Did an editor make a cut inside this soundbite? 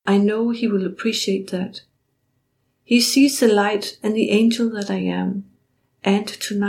no; 0 cuts

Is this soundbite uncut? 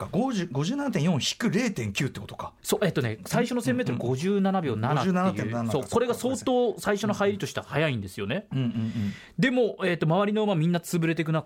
no; 1 cut; at 2.6 s

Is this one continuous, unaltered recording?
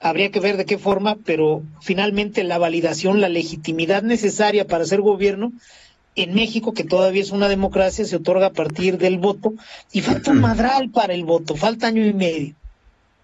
yes; 0 cuts

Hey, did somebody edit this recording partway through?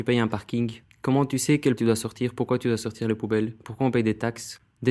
yes; 1 cut; at 1.8 s

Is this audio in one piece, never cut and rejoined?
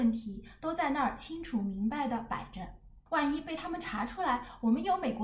no; 1 cut; at 3.1 s

